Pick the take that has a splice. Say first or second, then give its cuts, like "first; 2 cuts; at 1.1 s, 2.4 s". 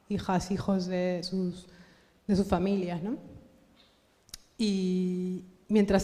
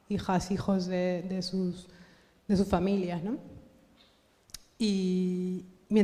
first; 1 cut; at 1.2 s